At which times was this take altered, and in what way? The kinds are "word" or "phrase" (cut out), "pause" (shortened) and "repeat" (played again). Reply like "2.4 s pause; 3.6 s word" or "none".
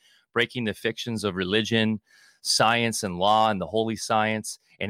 none

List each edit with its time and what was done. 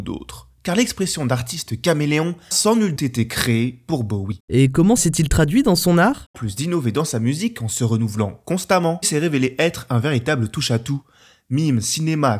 2.5 s word; 3.0 s word; 5.0 s word; 6.3 s word; 9.0 s word

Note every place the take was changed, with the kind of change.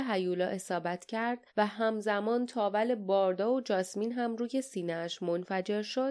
1.5 s pause

